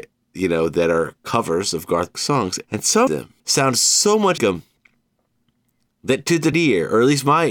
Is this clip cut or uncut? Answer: cut